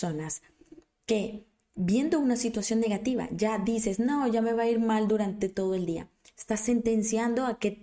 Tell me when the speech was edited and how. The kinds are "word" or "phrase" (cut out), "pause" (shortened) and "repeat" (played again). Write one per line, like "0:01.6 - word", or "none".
none